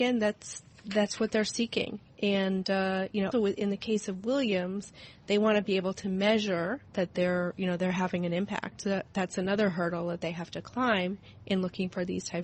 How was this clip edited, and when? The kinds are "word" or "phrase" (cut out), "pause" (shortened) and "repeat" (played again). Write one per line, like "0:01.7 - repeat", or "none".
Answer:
0:03.3 - word
0:06.9 - pause